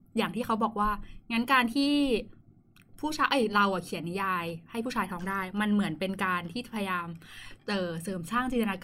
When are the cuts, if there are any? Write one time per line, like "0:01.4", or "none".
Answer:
0:07.6